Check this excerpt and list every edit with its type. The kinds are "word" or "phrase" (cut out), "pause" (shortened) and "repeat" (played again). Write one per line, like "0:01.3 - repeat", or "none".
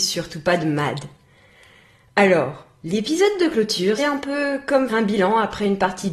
0:04.0 - word
0:04.9 - word